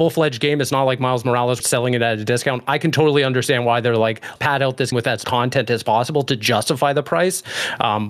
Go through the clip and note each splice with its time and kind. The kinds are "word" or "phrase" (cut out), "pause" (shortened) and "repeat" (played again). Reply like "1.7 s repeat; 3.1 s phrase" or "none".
1.6 s phrase; 4.4 s word; 4.9 s word; 5.2 s word